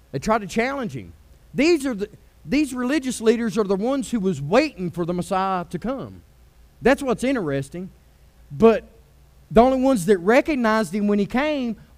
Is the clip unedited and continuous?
yes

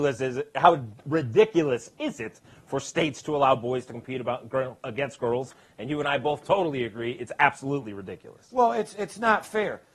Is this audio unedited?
yes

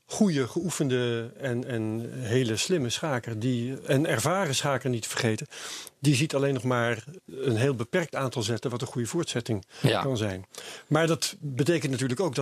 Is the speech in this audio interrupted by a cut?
no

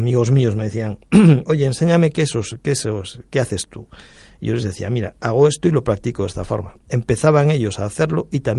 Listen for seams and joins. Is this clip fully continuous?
yes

